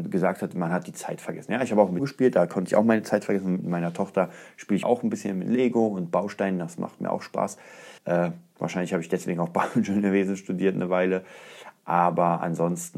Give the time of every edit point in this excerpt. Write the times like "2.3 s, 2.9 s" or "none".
2.0 s, 4.8 s, 8.0 s